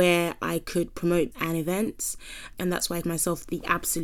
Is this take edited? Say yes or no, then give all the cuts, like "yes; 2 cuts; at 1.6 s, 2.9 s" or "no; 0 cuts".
yes; 3 cuts; at 1.3 s, 2.5 s, 3.0 s